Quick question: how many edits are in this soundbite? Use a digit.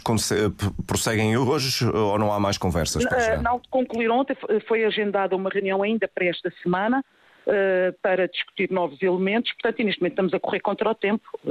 0